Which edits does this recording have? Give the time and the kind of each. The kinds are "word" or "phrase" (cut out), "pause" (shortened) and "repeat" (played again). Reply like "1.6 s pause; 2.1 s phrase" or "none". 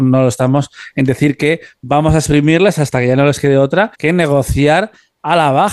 3.9 s pause

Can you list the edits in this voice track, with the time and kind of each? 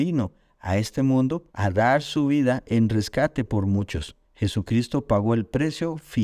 1.5 s pause; 4.2 s pause

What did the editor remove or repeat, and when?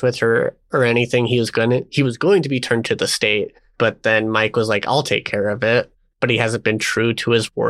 none

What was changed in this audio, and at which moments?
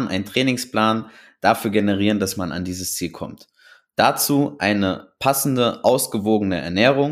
none

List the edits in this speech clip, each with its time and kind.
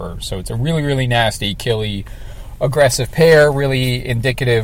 none

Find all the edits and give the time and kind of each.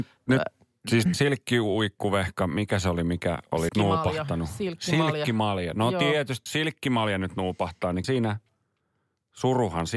1.1 s word; 3.7 s word; 6.5 s word; 8.0 s word

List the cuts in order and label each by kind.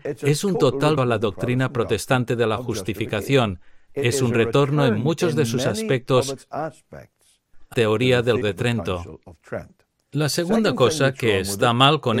1.0 s word; 7.7 s word; 8.4 s word

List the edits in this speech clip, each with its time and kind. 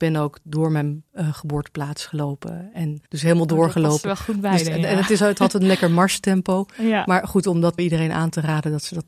1.1 s pause; 3.1 s pause; 7.8 s word

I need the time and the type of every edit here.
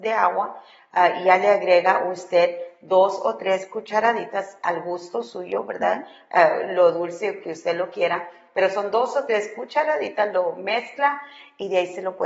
none

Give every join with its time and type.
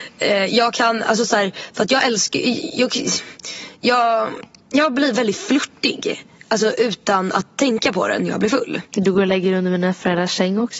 8.9 s pause

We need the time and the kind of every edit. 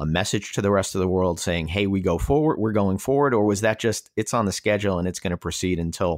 none

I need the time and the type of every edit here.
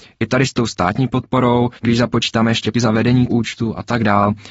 1.8 s pause; 2.7 s word; 3.3 s word

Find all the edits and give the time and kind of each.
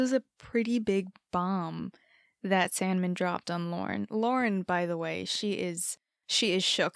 none

